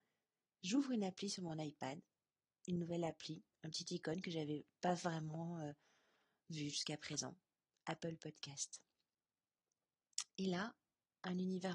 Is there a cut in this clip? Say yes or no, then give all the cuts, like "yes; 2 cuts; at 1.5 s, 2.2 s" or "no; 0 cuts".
no; 0 cuts